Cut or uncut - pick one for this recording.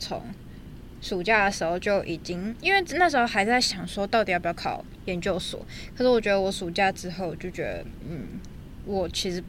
uncut